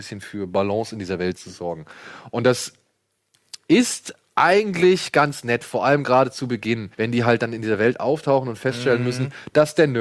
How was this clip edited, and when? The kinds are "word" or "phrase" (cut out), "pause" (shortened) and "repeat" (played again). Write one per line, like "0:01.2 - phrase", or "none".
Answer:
0:06.9 - pause